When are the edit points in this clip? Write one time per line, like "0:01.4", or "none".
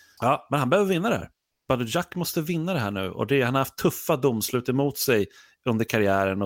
none